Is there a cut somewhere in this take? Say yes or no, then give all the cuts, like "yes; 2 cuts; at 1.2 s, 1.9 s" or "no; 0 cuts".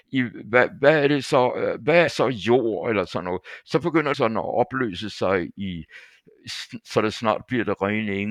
yes; 2 cuts; at 2.1 s, 4.1 s